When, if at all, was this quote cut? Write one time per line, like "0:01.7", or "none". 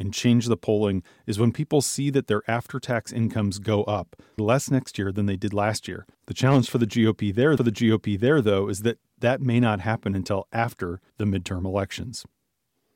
0:04.4
0:06.1
0:07.6
0:11.1